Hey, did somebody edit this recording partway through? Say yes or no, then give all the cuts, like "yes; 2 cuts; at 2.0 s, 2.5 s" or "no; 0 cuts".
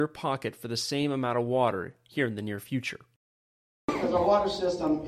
no; 0 cuts